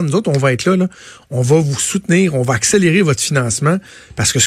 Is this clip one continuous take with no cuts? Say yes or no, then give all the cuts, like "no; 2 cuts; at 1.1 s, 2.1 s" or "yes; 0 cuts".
yes; 0 cuts